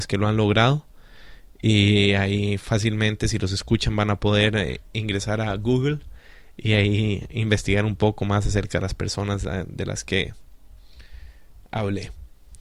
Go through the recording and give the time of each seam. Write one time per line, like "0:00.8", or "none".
none

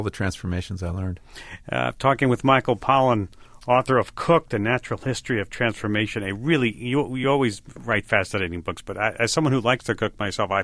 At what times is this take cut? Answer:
none

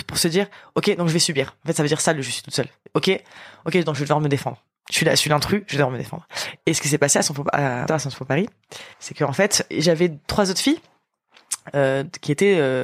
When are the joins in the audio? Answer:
0:02.9
0:07.9
0:08.9
0:09.7

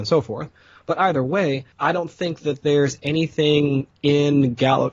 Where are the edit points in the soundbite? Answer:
0:01.7

